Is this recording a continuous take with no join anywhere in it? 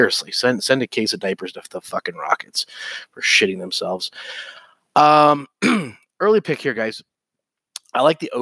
yes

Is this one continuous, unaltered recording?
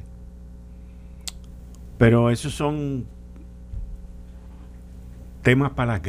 yes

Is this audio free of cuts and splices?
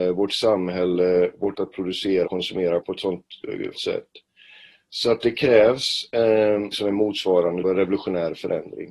no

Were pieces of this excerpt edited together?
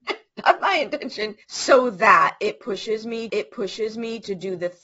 yes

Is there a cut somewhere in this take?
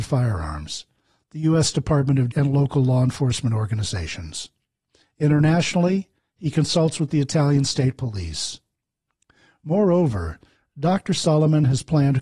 yes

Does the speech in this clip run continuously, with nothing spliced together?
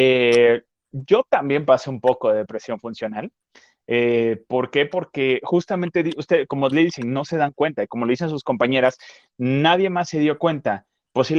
yes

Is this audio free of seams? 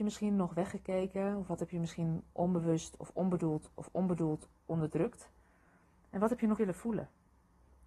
no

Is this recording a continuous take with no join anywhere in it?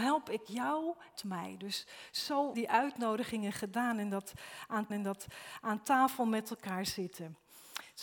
no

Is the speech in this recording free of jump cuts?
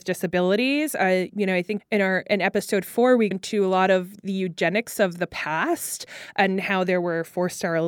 no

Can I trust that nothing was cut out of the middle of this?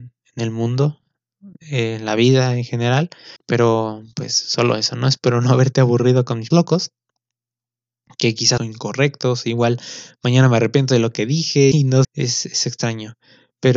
no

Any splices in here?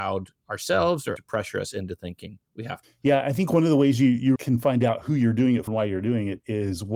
yes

